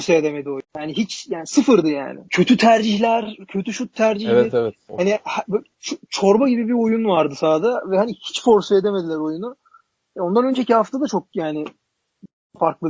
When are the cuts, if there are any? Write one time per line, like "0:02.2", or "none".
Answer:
none